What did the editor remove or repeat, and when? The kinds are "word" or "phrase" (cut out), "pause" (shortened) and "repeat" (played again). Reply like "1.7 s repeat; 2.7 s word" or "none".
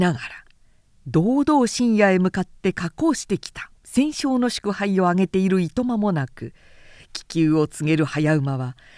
3.8 s pause